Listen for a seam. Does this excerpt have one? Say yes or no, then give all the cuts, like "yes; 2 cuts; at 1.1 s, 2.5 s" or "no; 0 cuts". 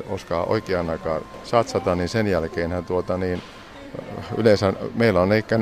no; 0 cuts